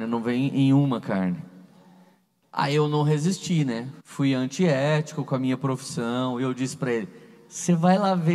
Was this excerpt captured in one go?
no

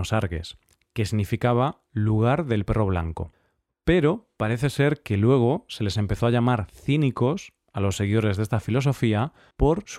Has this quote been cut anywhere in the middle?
no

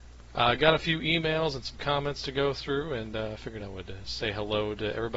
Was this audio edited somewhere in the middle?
no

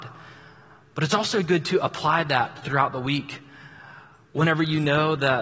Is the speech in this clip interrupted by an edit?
no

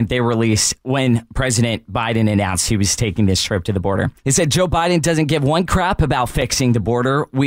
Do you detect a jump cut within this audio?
yes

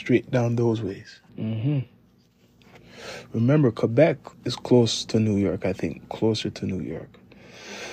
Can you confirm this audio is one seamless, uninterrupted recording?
no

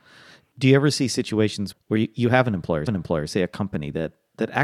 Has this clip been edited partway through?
yes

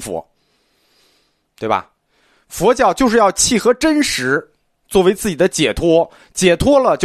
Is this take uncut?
yes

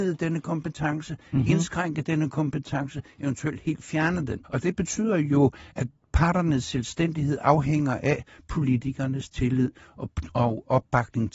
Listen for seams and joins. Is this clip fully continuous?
no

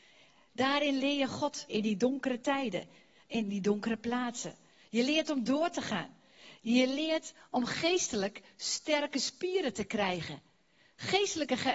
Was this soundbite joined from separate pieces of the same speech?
yes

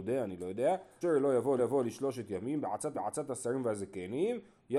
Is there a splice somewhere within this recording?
yes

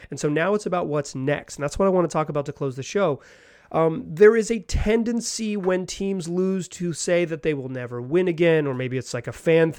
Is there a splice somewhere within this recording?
no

